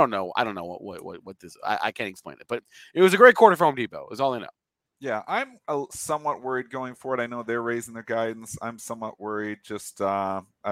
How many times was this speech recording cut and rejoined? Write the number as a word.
zero